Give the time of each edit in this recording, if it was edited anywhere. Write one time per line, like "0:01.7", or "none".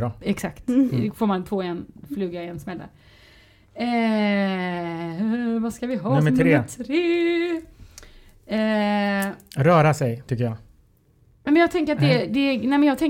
none